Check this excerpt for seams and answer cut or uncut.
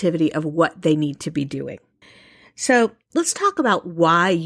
cut